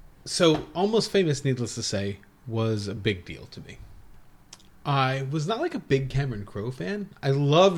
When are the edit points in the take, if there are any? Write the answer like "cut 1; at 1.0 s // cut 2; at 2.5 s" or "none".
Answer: none